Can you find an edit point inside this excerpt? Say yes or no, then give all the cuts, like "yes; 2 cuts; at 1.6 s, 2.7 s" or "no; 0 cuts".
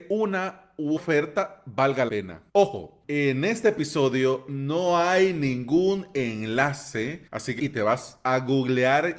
yes; 5 cuts; at 1.0 s, 2.1 s, 2.5 s, 7.3 s, 7.6 s